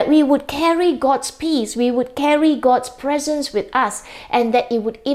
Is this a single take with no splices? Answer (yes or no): yes